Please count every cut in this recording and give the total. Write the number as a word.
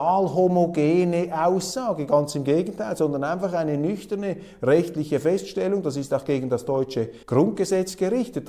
one